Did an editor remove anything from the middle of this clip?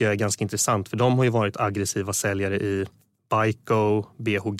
no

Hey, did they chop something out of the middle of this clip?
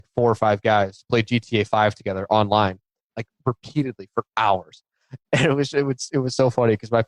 no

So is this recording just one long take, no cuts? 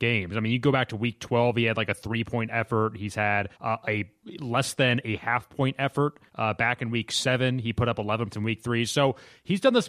no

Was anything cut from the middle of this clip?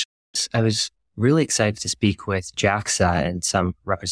no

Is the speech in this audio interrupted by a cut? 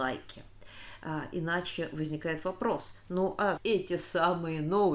yes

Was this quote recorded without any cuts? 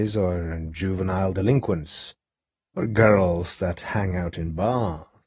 yes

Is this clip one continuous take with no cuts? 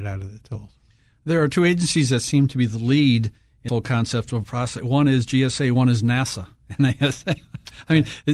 no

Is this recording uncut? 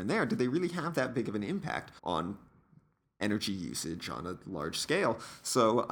no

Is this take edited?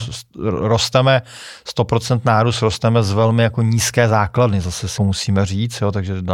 yes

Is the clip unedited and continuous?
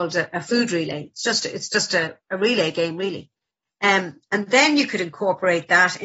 yes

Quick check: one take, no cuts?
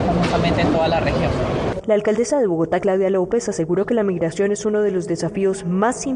yes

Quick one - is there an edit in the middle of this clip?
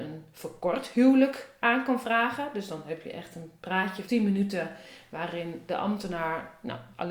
yes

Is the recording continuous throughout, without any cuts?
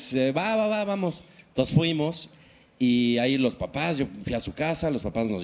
yes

